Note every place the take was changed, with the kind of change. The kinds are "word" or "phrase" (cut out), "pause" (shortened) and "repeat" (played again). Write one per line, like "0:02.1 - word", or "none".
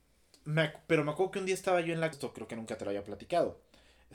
0:02.1 - word